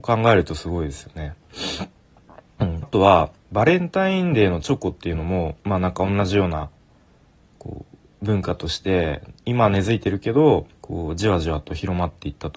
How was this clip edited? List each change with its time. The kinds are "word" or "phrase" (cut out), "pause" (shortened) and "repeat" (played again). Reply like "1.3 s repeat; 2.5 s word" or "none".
2.8 s phrase; 5.6 s pause; 10.8 s pause